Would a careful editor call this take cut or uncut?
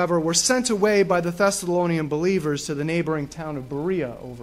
uncut